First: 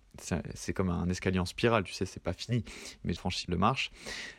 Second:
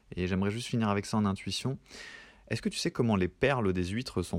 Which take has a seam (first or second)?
first